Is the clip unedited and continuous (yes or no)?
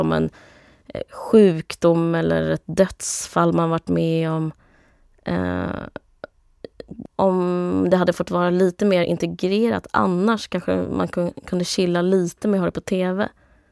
no